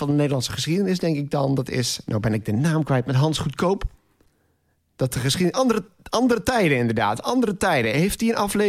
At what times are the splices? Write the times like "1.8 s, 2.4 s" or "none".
none